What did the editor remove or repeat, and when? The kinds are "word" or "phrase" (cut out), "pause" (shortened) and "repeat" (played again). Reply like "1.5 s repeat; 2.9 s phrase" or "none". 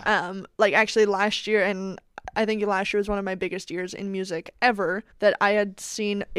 5.1 s pause